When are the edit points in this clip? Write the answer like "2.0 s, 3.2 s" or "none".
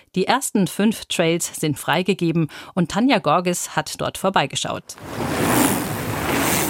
1.8 s